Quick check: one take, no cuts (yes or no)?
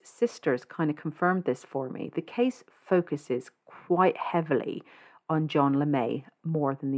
yes